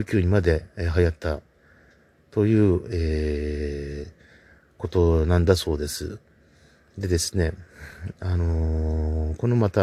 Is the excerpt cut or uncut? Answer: uncut